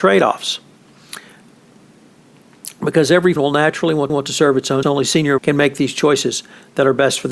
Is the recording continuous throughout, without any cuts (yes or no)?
no